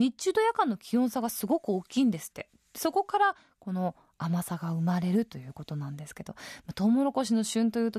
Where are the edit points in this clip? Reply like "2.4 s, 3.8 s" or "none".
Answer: none